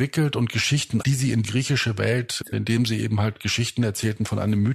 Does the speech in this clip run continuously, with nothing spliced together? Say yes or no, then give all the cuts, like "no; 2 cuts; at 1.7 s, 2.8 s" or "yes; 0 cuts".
no; 3 cuts; at 1.0 s, 1.4 s, 2.5 s